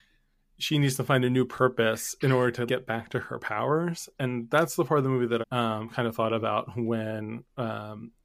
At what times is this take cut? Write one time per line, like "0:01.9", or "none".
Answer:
0:02.7
0:05.4